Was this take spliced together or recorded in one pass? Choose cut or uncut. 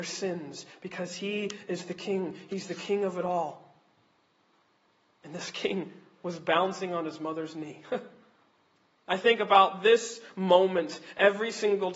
uncut